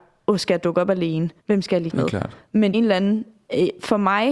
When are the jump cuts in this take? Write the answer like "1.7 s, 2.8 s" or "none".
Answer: 1.4 s, 1.9 s, 2.7 s